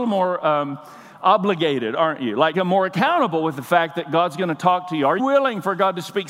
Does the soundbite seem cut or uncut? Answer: cut